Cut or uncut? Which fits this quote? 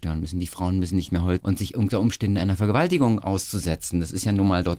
cut